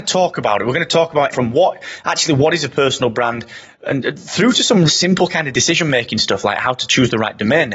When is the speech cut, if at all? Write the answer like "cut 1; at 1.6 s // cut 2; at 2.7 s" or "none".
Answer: cut 1; at 1.3 s // cut 2; at 4.9 s